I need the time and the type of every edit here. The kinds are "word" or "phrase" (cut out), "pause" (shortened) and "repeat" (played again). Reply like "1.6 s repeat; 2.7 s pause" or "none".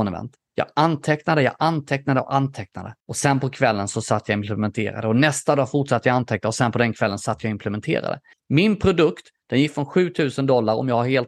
3.0 s pause; 8.3 s pause